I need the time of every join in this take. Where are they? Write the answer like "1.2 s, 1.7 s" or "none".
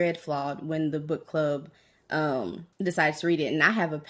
2.7 s